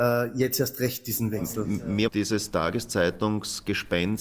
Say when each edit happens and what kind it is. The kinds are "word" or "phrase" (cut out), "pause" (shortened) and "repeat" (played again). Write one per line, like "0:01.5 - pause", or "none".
0:02.1 - word

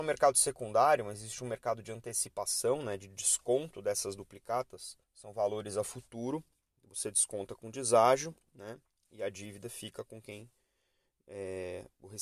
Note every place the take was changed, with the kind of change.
0:05.0 - pause
0:08.9 - pause

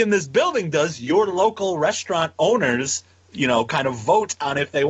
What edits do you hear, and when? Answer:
none

